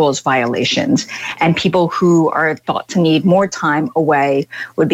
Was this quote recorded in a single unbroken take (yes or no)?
yes